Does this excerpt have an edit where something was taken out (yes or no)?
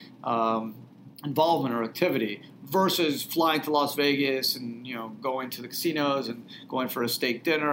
yes